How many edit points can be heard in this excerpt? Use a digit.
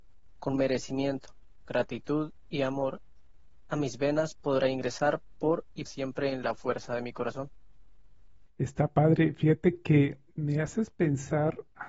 4